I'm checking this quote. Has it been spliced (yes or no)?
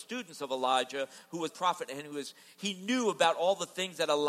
yes